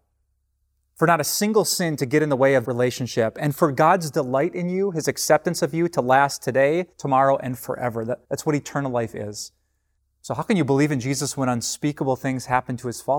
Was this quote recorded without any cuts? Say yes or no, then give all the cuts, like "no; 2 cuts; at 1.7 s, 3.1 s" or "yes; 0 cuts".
no; 4 cuts; at 2.6 s, 6.9 s, 8.2 s, 10.0 s